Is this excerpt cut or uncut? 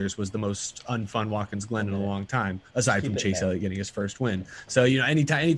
uncut